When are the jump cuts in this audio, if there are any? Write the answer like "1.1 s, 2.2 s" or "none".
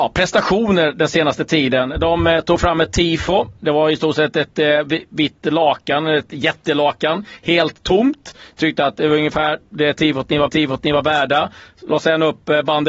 10.5 s